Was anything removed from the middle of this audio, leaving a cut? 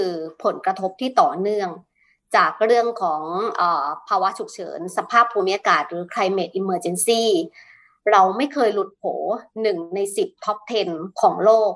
no; 0 cuts

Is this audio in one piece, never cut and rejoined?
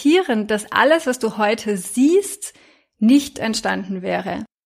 yes; 0 cuts

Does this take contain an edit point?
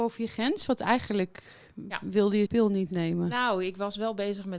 yes; 1 cut; at 2.5 s

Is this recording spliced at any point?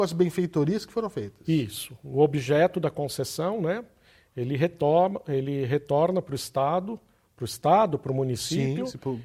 no; 0 cuts

